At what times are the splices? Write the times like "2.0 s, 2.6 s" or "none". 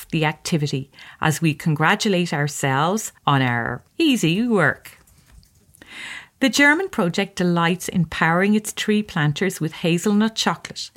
3.2 s, 3.9 s